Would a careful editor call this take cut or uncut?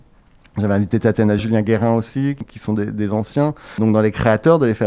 cut